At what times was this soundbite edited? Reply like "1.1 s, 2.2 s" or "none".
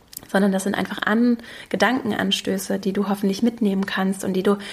none